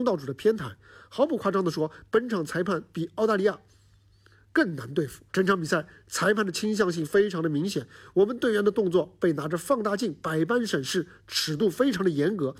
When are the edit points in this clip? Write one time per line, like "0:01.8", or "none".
0:05.3